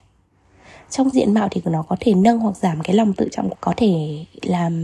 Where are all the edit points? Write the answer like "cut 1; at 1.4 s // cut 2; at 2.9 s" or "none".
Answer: cut 1; at 1.1 s // cut 2; at 3.5 s

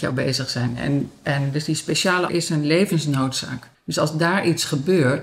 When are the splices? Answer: cut 1; at 2.3 s // cut 2; at 3.7 s

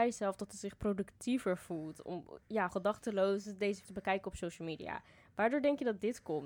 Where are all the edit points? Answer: cut 1; at 2.7 s // cut 2; at 3.8 s

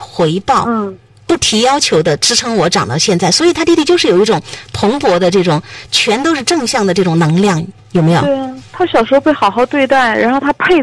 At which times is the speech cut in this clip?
none

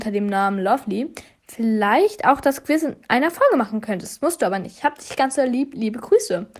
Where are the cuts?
none

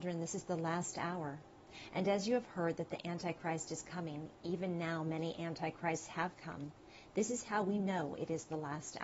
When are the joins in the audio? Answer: none

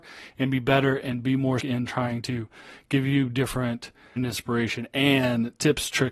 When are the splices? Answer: cut 1; at 1.6 s // cut 2; at 4.2 s

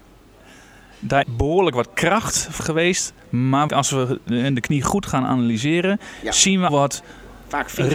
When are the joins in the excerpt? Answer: cut 1; at 1.2 s // cut 2; at 2.6 s // cut 3; at 3.7 s // cut 4; at 6.7 s

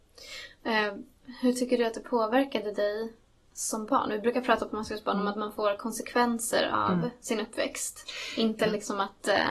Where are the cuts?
none

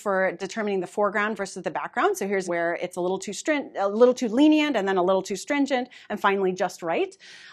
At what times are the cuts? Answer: cut 1; at 2.5 s

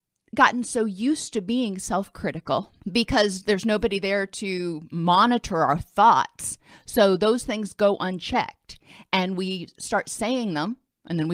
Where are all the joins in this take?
cut 1; at 2.8 s

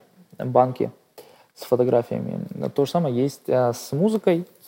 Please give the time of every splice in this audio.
none

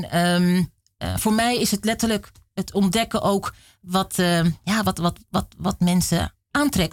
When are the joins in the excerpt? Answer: none

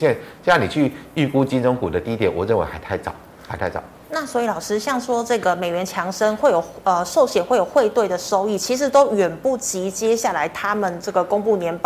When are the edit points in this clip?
none

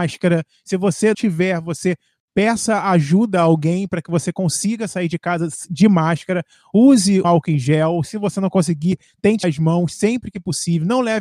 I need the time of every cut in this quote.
cut 1; at 1.1 s // cut 2; at 7.2 s // cut 3; at 9.4 s

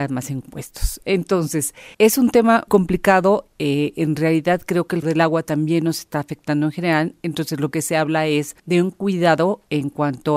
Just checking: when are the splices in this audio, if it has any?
cut 1; at 1.9 s // cut 2; at 2.7 s // cut 3; at 5.0 s // cut 4; at 7.7 s // cut 5; at 8.6 s

